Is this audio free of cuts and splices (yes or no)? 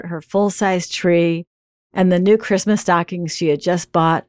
yes